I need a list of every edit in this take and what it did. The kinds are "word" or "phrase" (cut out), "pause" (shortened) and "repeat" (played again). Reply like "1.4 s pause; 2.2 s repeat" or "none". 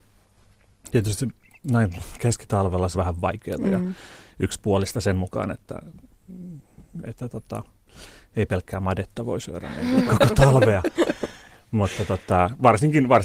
2.9 s word; 10.1 s word